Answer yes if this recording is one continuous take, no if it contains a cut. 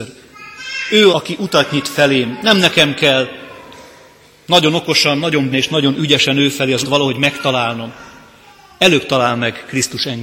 no